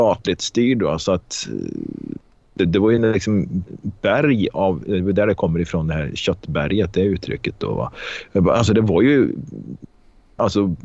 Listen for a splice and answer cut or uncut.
uncut